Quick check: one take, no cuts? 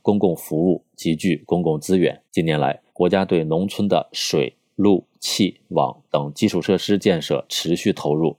no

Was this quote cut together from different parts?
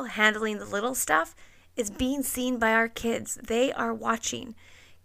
no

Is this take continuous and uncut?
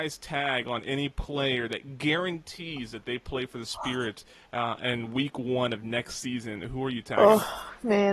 yes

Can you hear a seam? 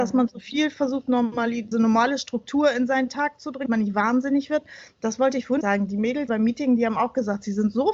yes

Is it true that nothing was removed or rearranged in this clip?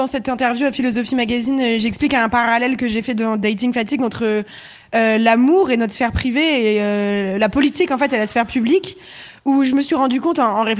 yes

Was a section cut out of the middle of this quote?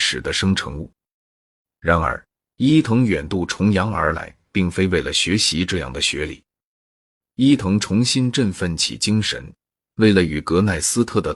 no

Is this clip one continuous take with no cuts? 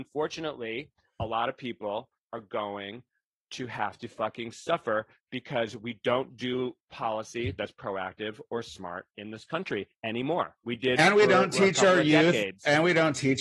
yes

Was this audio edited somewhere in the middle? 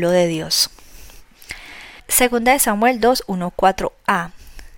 yes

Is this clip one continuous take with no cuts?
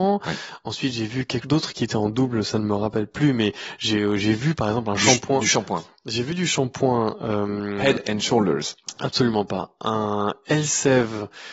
no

